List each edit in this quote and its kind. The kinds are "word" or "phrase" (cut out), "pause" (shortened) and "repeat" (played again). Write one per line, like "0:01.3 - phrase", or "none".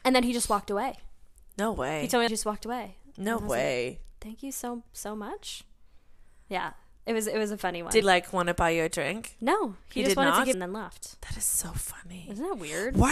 0:02.3 - phrase
0:08.0 - word
0:10.5 - phrase